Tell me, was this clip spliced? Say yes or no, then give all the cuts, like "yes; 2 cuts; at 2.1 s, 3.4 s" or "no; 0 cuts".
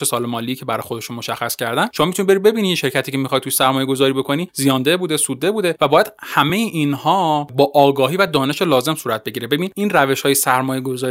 no; 0 cuts